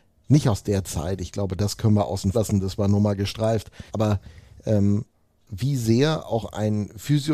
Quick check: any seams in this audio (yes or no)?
yes